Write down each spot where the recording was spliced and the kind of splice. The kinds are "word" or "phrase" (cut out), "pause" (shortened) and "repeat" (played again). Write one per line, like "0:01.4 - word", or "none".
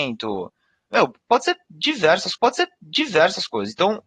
0:02.3 - repeat